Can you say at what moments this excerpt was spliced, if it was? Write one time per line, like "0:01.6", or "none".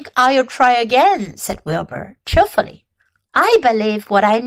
none